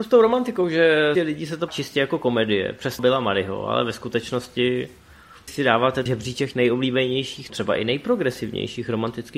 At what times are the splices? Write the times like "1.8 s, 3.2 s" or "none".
1.2 s, 1.7 s, 3.0 s, 5.5 s, 6.1 s, 6.5 s, 7.5 s